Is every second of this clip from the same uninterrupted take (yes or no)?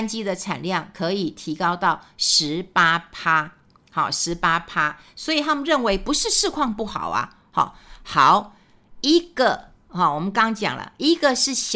yes